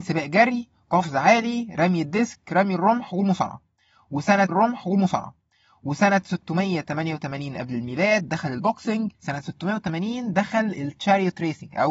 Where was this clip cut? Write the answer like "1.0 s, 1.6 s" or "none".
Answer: 4.5 s, 9.1 s

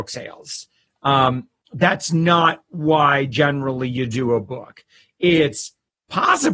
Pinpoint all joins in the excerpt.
none

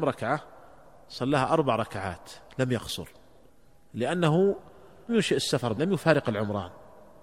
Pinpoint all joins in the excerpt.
5.1 s, 5.8 s

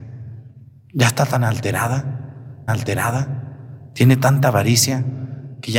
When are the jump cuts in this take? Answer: 2.7 s

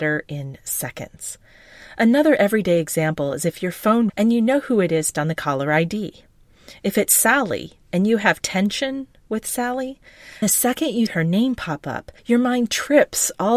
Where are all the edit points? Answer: 4.1 s, 5.1 s, 10.4 s, 11.1 s, 12.2 s

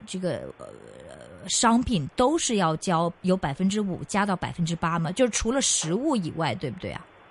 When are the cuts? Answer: none

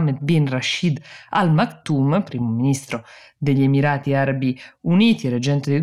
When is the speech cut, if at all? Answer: none

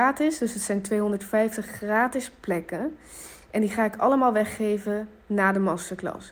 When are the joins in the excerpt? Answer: none

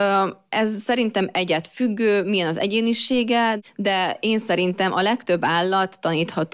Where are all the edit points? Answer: none

